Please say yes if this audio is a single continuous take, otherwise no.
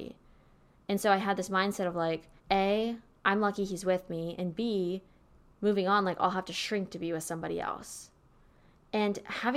no